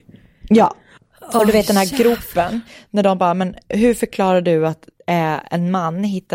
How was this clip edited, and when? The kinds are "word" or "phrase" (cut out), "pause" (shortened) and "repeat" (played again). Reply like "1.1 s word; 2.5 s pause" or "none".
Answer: 1.0 s pause